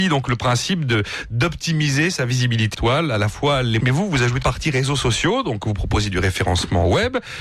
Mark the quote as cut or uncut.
cut